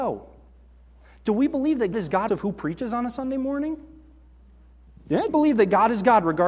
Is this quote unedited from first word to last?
no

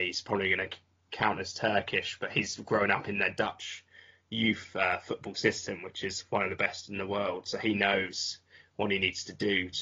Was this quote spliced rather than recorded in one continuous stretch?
no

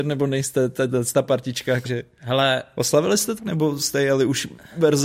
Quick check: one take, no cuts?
no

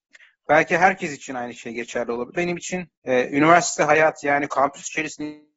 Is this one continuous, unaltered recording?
no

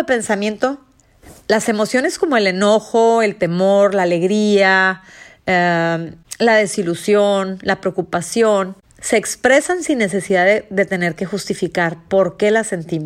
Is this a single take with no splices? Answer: yes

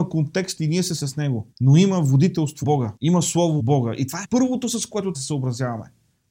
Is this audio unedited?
no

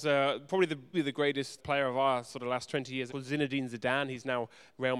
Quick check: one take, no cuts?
no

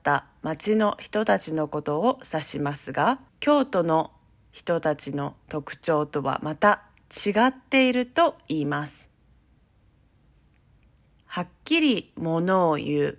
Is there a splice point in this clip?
yes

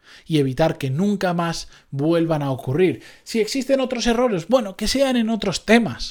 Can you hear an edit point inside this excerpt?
no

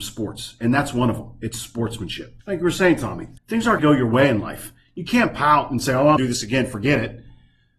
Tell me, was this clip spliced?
yes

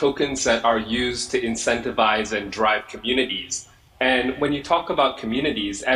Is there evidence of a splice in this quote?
no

